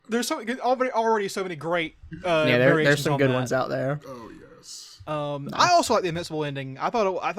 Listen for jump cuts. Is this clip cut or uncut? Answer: uncut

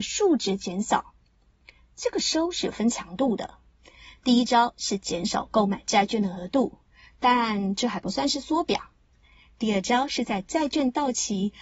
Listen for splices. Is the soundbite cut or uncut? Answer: uncut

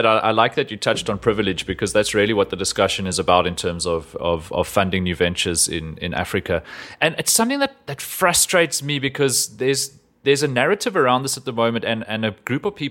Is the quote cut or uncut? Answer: uncut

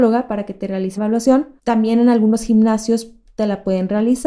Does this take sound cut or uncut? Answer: cut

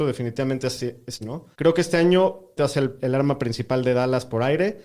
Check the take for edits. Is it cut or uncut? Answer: cut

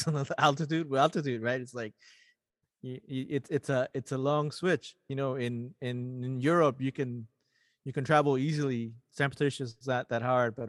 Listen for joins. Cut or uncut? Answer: uncut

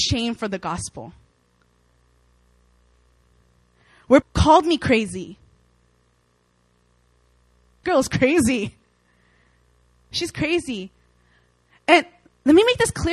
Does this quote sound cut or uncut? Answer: cut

